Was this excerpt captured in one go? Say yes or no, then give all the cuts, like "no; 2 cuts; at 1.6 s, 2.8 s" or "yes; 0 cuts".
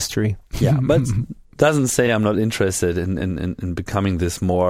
yes; 0 cuts